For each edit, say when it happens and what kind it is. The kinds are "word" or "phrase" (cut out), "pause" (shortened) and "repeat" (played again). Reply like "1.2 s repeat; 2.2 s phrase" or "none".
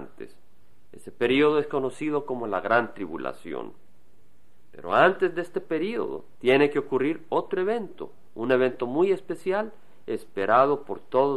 none